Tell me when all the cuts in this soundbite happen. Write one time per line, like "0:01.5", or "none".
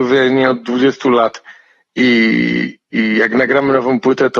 none